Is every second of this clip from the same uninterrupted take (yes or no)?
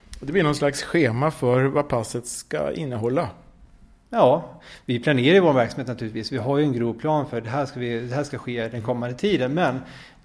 yes